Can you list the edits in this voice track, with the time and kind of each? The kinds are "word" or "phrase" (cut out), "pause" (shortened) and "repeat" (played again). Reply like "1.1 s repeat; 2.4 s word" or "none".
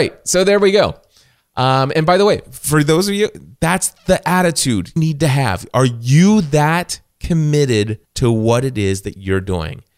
1.9 s word; 5.0 s phrase; 8.0 s pause